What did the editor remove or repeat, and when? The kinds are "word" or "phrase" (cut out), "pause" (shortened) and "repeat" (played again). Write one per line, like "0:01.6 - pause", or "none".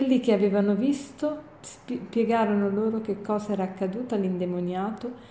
0:01.5 - pause